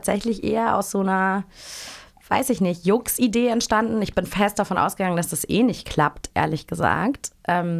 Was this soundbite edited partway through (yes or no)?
no